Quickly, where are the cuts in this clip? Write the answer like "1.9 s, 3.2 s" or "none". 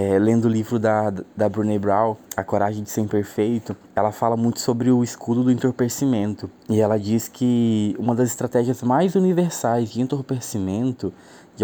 2.2 s, 3.8 s, 6.6 s

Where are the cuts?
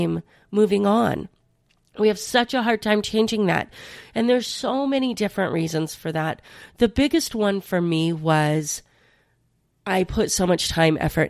none

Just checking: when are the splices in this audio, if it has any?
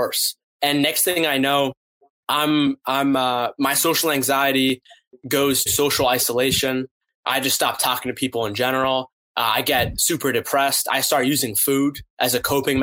5.7 s

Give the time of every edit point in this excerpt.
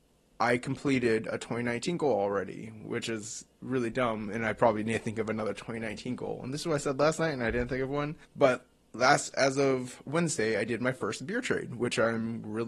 8.2 s

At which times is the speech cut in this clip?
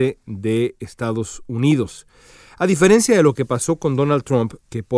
none

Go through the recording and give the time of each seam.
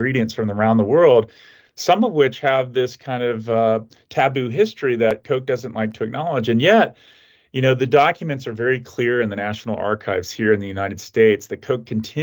none

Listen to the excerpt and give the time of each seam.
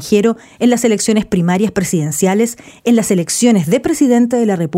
none

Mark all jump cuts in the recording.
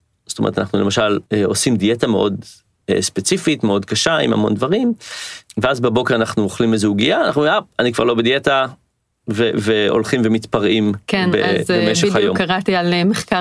1.3 s

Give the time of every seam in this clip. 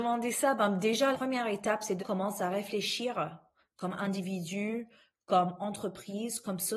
1.1 s, 2.0 s

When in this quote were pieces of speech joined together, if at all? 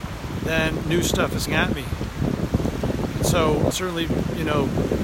1.5 s, 3.7 s

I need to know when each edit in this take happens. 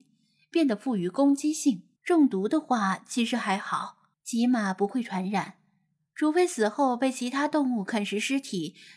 2.0 s, 4.1 s

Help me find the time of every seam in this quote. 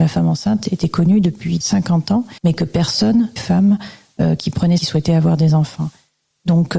1.6 s, 2.4 s, 3.4 s, 4.8 s

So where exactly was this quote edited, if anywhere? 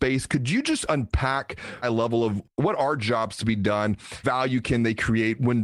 1.8 s, 4.2 s

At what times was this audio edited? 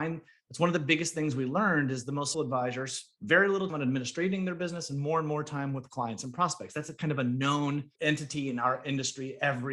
2.3 s, 3.2 s, 3.7 s, 8.0 s

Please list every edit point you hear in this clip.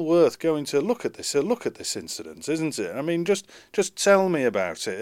1.3 s

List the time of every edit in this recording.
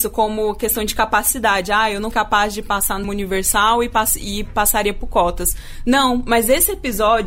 2.1 s, 3.0 s

